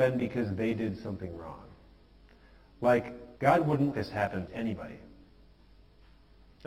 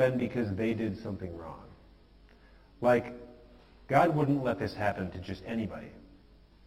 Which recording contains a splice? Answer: first; 3 cuts; at 3.4 s, 3.9 s, 4.5 s

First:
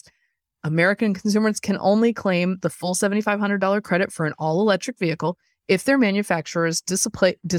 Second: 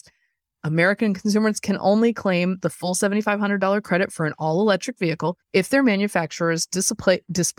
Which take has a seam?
second; 1 cut; at 5.4 s

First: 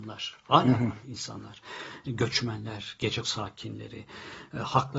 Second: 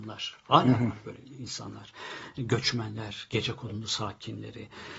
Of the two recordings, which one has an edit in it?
first; 2 cuts; at 1.0 s, 3.2 s

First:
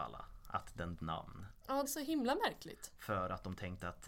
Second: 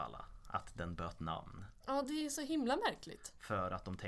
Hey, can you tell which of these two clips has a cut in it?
first; 2 cuts; at 1.0 s, 1.8 s

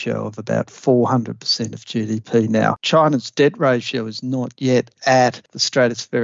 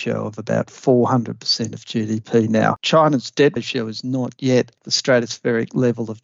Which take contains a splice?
second; 2 cuts; at 3.6 s, 4.8 s

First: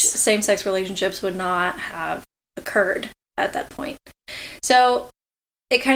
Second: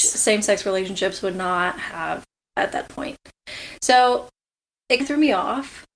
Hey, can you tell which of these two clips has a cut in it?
second; 2 cuts; at 2.4 s, 5.0 s

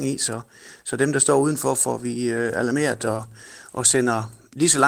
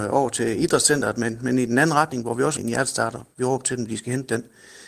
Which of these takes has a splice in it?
second; 1 cut; at 2.6 s

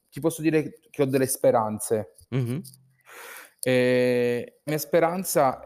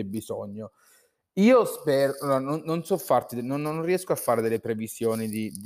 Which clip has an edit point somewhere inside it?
first; 1 cut; at 4.7 s

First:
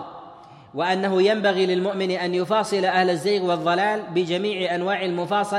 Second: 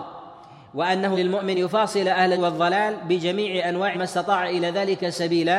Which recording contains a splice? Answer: second; 4 cuts; at 1.1 s, 1.5 s, 2.3 s, 3.9 s

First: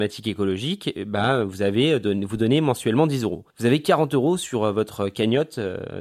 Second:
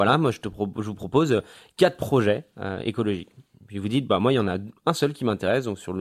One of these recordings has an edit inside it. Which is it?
first; 1 cut; at 3.5 s

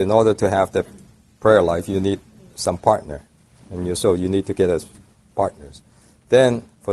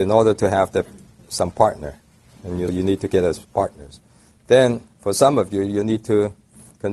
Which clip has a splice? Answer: second; 3 cuts; at 1.2 s, 2.7 s, 3.4 s

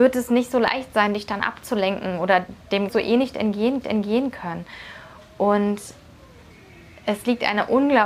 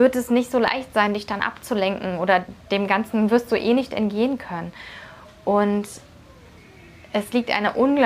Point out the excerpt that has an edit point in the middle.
first; 2 cuts; at 2.9 s, 3.8 s

